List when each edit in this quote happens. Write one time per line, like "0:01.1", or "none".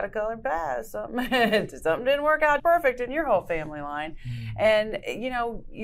0:02.6